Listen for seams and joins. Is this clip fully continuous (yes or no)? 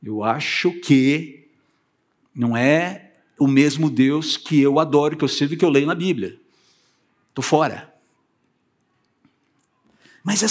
yes